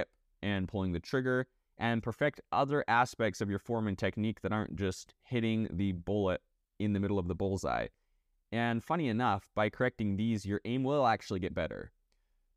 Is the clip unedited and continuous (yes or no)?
yes